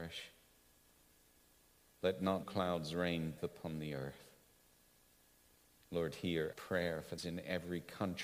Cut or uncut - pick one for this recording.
cut